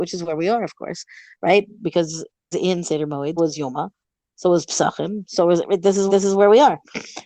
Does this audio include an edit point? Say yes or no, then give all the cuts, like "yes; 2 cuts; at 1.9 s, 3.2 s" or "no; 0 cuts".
yes; 3 cuts; at 2.5 s, 3.4 s, 6.1 s